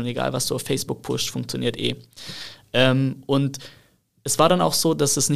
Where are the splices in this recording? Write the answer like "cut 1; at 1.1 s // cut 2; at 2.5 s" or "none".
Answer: none